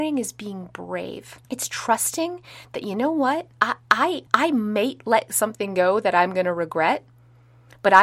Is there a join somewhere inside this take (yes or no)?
yes